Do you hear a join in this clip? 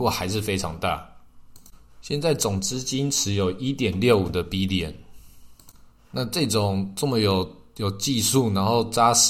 no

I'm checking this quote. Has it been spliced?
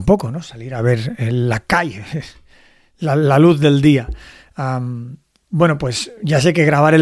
no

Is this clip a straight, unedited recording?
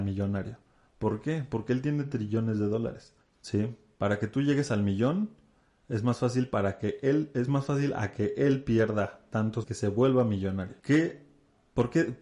no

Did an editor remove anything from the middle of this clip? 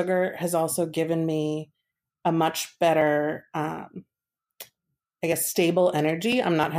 no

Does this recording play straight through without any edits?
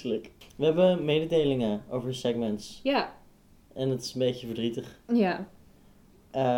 yes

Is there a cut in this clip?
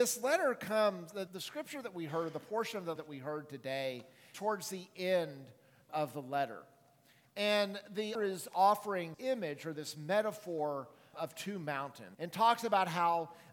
yes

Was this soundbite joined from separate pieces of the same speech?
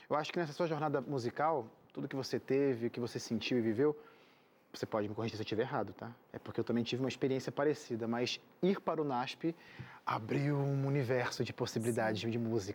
no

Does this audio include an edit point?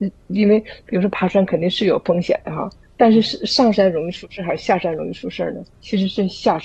yes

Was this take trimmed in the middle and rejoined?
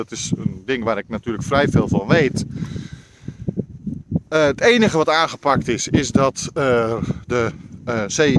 no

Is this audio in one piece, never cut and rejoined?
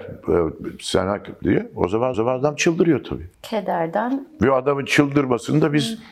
no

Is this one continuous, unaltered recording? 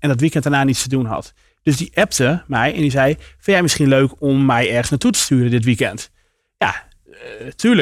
yes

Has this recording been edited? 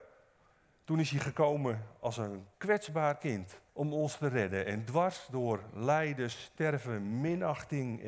yes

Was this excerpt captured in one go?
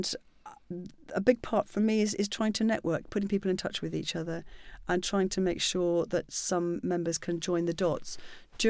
yes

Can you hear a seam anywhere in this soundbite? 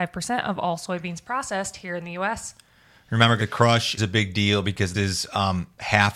yes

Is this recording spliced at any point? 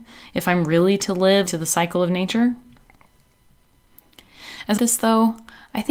yes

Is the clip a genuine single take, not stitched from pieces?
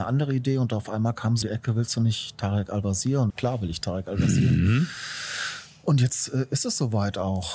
no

